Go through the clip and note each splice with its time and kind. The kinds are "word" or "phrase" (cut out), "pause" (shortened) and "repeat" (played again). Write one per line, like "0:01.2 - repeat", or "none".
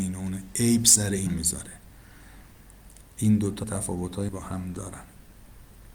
0:01.3 - word
0:03.6 - word
0:04.3 - word